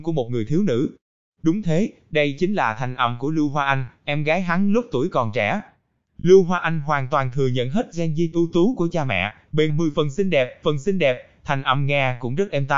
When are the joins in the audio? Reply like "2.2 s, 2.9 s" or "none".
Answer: 8.3 s, 9.7 s, 10.6 s